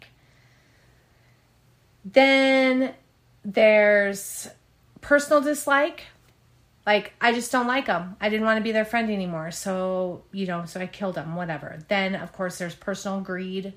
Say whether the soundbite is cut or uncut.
uncut